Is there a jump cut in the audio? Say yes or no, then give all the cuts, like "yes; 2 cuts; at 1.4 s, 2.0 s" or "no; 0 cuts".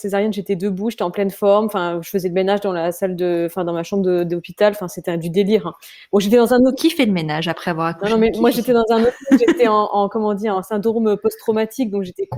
no; 0 cuts